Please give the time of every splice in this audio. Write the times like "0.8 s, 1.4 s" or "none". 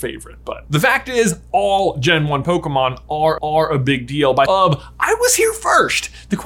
3.4 s, 4.5 s